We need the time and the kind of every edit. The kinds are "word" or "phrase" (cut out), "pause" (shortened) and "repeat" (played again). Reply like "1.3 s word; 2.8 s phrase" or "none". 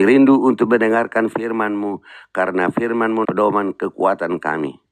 3.2 s word